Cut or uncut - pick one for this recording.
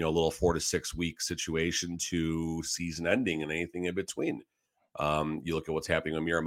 uncut